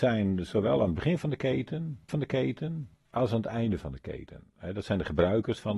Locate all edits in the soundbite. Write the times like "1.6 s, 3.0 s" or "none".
2.1 s